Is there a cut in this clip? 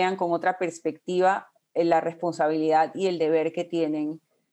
no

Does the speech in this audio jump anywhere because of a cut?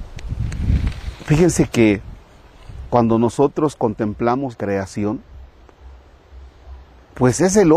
yes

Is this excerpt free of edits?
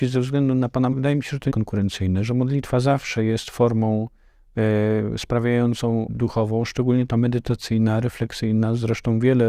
no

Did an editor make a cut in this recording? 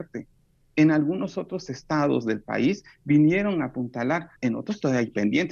yes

